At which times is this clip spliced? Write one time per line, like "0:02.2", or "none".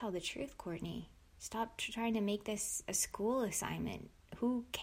none